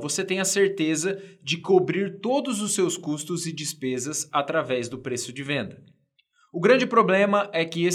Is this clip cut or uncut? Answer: uncut